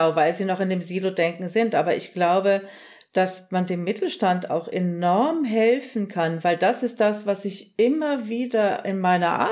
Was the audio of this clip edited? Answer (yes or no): no